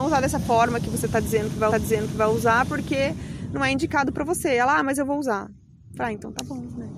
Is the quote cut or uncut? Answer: cut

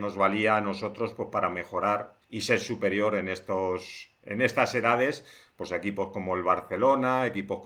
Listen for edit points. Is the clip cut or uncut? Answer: cut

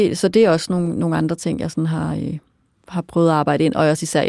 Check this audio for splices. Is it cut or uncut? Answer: uncut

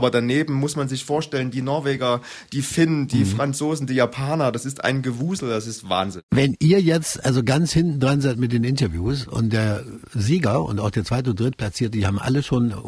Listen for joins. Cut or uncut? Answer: uncut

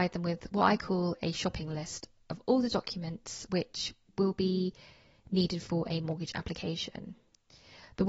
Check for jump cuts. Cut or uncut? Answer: uncut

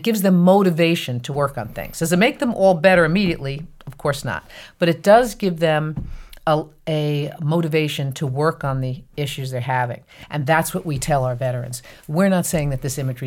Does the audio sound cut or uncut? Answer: cut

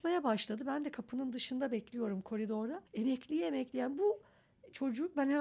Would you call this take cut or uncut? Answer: cut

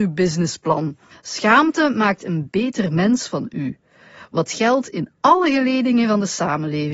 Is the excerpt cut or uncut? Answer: cut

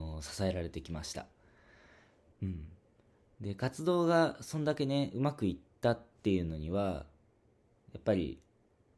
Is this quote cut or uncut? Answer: uncut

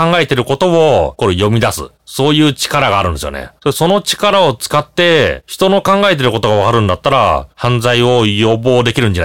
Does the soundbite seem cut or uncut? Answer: uncut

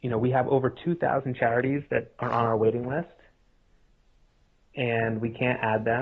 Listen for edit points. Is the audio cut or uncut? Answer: uncut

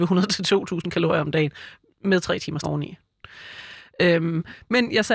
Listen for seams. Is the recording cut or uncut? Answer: cut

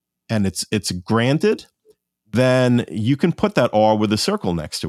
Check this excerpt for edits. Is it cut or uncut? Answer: uncut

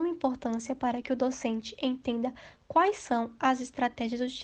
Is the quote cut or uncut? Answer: uncut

